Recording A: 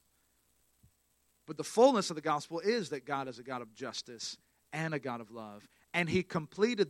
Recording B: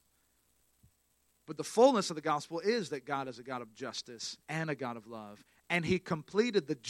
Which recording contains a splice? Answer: B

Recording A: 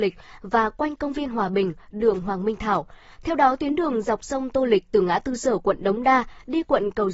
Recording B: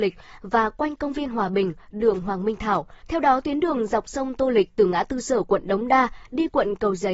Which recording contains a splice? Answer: B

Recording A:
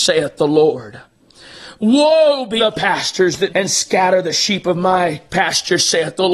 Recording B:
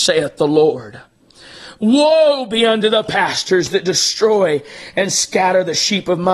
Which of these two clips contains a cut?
A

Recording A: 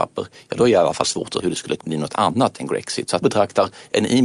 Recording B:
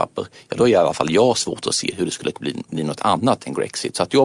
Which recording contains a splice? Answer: A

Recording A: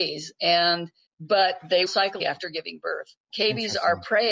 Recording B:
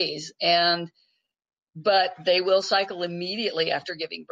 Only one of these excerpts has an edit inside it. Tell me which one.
A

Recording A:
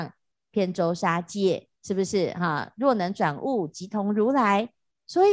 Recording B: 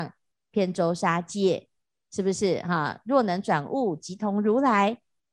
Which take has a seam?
A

